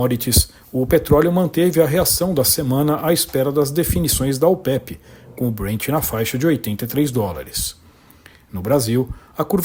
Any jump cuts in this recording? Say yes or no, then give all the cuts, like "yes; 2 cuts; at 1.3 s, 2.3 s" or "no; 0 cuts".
no; 0 cuts